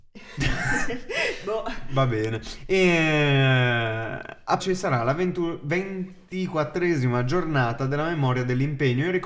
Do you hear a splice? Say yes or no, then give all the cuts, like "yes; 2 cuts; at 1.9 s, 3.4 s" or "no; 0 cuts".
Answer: yes; 1 cut; at 4.6 s